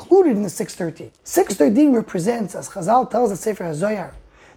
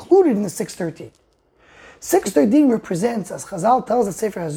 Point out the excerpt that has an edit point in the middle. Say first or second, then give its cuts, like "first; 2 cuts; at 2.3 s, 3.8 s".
first; 1 cut; at 1.2 s